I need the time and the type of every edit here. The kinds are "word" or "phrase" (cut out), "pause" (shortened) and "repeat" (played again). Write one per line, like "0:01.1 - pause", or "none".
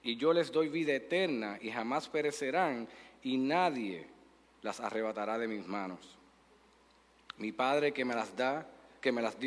none